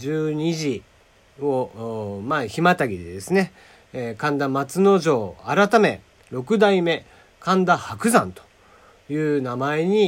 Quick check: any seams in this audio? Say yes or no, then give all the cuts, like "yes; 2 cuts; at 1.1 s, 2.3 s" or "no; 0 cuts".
no; 0 cuts